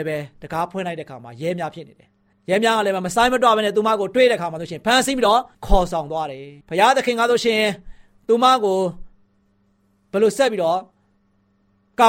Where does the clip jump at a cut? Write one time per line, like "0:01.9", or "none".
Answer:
0:02.3
0:05.5
0:06.6